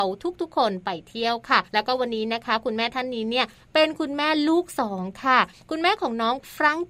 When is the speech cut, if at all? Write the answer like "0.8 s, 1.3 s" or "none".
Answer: 1.7 s